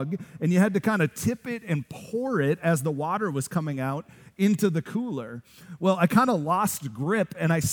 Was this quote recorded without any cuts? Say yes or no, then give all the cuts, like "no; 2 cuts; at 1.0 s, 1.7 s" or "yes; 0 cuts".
yes; 0 cuts